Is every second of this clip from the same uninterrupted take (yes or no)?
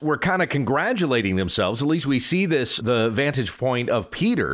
no